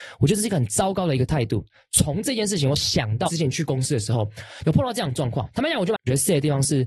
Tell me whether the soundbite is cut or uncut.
cut